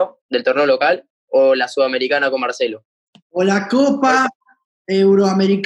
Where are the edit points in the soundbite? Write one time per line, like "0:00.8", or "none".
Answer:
none